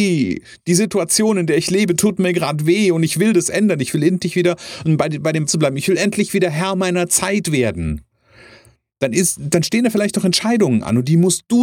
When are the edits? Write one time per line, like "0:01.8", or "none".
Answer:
0:05.5

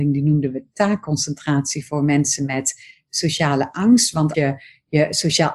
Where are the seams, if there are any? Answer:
0:04.3

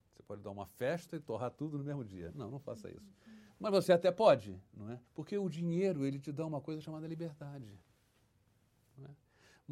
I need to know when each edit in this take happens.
0:05.1

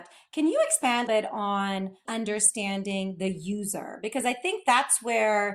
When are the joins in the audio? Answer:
0:01.1
0:02.1

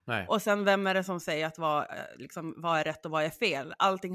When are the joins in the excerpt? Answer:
none

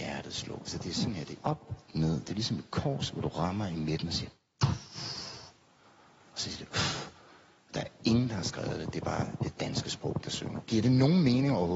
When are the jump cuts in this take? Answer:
0:01.4

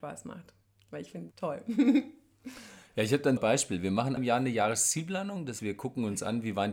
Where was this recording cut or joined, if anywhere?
0:01.3
0:03.4
0:04.2
0:05.6

